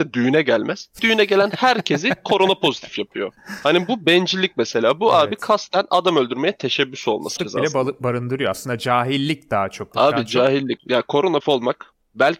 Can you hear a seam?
yes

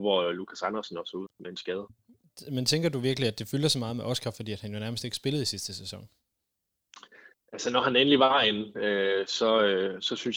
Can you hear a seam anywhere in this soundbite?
yes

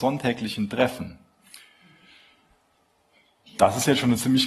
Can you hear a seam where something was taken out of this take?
no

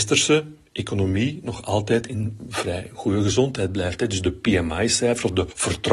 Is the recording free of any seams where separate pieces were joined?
yes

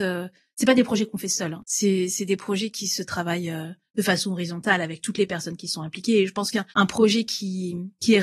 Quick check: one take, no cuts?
no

